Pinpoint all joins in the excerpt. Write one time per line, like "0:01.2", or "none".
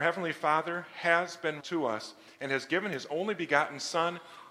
0:01.6